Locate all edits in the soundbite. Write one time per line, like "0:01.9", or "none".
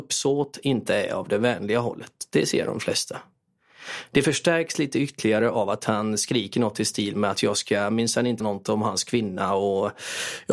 0:08.4